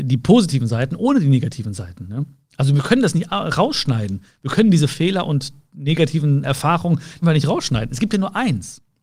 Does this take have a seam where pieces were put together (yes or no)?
yes